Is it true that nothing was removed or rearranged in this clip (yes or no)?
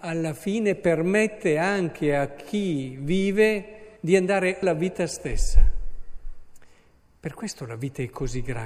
no